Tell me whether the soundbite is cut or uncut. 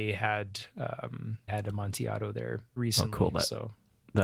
cut